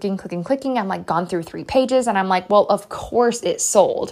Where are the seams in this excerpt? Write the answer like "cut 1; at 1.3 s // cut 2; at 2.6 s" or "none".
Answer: none